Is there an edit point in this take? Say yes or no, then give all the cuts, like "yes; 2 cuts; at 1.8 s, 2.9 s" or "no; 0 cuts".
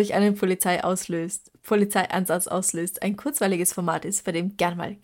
no; 0 cuts